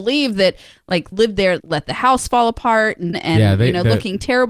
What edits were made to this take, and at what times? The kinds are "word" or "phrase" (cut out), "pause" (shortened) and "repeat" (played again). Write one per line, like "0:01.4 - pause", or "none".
0:01.1 - phrase
0:01.6 - word
0:03.1 - phrase